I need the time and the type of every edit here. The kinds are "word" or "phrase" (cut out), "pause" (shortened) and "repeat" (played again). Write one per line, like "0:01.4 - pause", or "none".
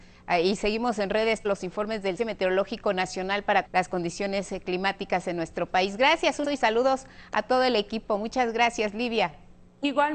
0:01.4 - word
0:02.2 - word
0:03.6 - word
0:06.4 - word